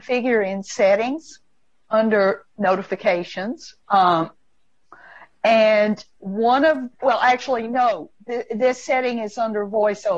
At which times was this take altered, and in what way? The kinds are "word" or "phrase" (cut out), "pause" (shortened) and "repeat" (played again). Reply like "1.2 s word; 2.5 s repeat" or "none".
3.8 s pause; 7.0 s word